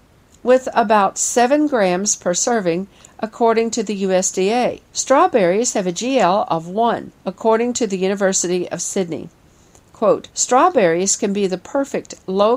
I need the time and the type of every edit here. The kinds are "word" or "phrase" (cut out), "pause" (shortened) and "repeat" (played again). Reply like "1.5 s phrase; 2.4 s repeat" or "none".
4.9 s pause; 7.2 s pause; 10.3 s pause